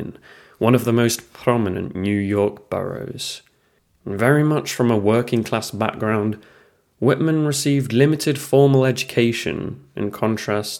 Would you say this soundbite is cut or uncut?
uncut